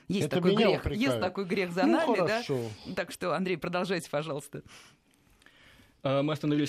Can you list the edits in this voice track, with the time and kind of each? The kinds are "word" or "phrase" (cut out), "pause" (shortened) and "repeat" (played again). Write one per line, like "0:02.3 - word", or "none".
none

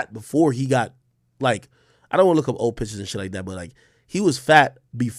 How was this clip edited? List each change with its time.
none

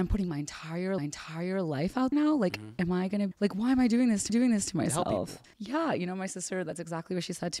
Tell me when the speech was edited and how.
0:01.0 - repeat
0:02.1 - word
0:03.3 - word
0:04.3 - repeat
0:05.5 - pause

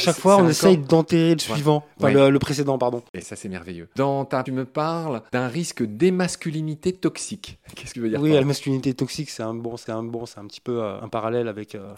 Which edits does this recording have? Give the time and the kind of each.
0:03.9 - pause
0:04.5 - phrase
0:05.3 - pause
0:07.9 - phrase
0:08.4 - word
0:09.9 - repeat
0:11.0 - word

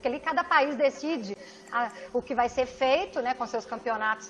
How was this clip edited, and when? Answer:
none

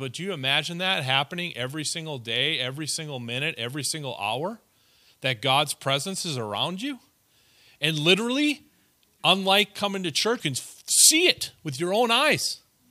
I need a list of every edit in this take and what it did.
0:10.4 - word

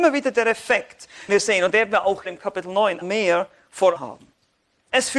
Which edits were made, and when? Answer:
0:01.3 - word
0:01.7 - word
0:02.2 - word
0:03.0 - word
0:03.9 - word

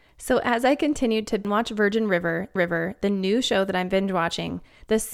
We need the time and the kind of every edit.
0:02.6 - repeat

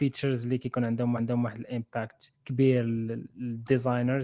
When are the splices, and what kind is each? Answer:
0:01.2 - repeat
0:02.3 - word

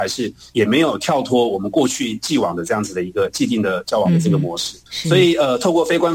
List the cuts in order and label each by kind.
0:04.9 - pause

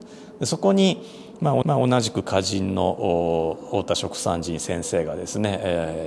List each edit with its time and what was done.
0:01.6 - repeat

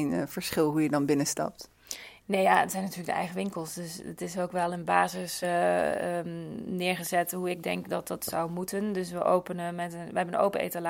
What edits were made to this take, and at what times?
none

